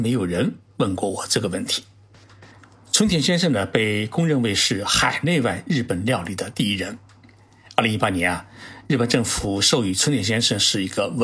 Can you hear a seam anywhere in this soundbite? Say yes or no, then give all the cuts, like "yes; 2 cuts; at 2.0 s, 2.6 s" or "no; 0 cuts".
no; 0 cuts